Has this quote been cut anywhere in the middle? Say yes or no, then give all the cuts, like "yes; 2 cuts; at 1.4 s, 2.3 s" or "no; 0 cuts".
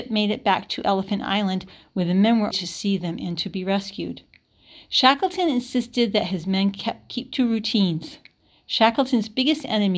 yes; 1 cut; at 2.5 s